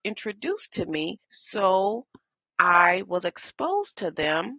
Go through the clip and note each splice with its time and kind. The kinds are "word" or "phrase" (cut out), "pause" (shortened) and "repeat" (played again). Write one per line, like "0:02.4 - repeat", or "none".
0:01.2 - pause